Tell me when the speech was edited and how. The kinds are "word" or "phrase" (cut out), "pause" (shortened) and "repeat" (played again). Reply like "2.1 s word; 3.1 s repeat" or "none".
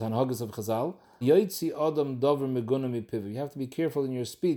1.2 s word